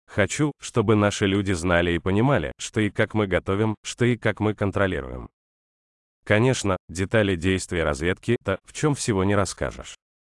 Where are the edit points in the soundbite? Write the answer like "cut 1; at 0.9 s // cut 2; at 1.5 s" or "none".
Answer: cut 1; at 6.8 s // cut 2; at 8.4 s